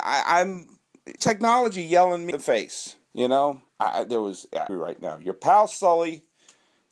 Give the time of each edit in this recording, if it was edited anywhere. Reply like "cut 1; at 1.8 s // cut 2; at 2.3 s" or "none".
cut 1; at 1.2 s // cut 2; at 2.3 s // cut 3; at 3.0 s // cut 4; at 3.7 s // cut 5; at 4.7 s